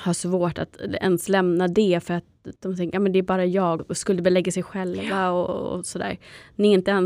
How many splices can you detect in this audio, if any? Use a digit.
2